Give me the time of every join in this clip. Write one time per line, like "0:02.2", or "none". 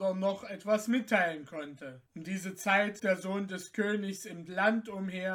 0:02.1
0:03.0